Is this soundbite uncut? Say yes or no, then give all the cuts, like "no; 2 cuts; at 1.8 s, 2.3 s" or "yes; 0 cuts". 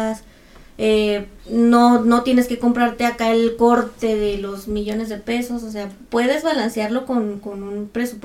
no; 1 cut; at 1.4 s